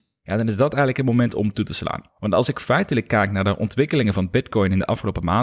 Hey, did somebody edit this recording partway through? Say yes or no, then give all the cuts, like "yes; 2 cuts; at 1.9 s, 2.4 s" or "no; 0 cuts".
yes; 1 cut; at 2.1 s